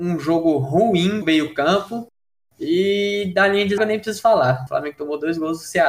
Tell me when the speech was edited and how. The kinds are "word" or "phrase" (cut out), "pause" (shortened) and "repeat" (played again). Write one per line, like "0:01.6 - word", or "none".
0:01.2 - word
0:03.8 - word
0:04.7 - word